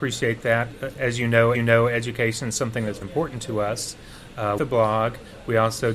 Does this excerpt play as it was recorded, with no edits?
no; 4 cuts; at 0.9 s, 1.5 s, 3.0 s, 4.6 s

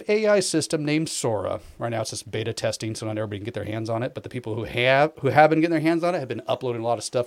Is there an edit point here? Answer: no; 0 cuts

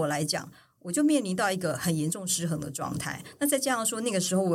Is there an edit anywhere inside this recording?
no; 0 cuts

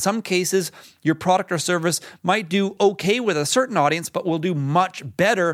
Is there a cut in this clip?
no; 0 cuts

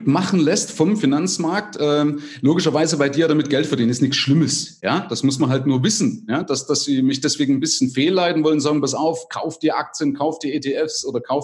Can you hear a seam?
no; 0 cuts

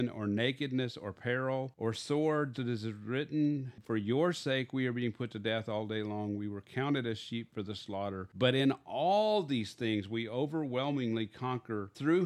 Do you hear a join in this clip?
yes; 1 cut; at 2.5 s

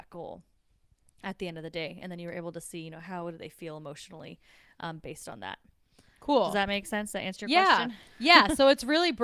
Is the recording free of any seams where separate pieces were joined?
yes; 0 cuts

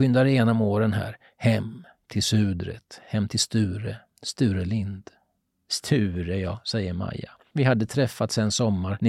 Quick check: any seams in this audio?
no; 0 cuts

